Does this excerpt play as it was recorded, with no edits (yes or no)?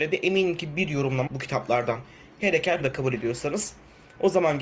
no